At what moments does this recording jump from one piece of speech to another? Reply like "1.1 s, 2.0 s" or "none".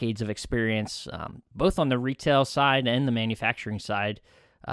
none